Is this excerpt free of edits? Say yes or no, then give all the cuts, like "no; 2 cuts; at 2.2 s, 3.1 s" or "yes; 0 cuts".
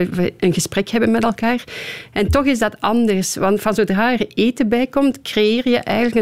yes; 0 cuts